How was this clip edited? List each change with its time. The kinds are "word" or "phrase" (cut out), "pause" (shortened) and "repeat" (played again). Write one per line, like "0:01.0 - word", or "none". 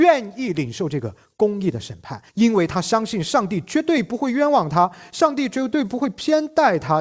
0:02.3 - pause